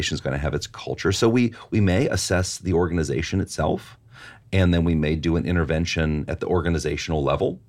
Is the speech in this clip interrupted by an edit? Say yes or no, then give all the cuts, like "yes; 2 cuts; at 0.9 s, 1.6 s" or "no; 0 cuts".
no; 0 cuts